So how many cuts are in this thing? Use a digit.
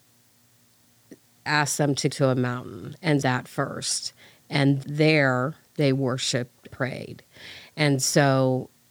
5